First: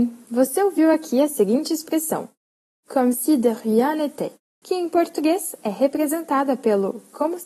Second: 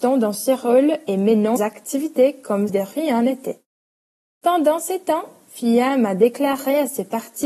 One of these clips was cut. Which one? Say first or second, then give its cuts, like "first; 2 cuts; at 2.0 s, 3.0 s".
second; 2 cuts; at 1.6 s, 2.7 s